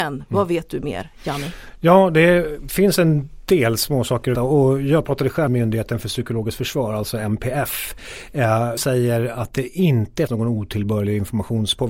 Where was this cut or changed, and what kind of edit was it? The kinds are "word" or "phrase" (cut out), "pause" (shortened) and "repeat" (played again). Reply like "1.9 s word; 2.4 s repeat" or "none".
4.4 s word; 5.5 s word; 8.8 s word; 10.3 s word